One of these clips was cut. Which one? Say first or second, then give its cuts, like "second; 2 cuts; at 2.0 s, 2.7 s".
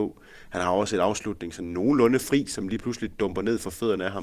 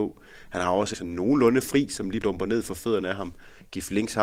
second; 2 cuts; at 0.9 s, 2.2 s